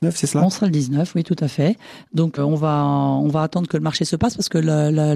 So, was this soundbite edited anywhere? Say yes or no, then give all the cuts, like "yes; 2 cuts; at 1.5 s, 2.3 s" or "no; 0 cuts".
yes; 1 cut; at 2.4 s